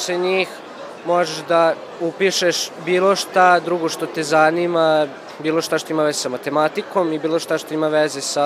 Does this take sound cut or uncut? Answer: uncut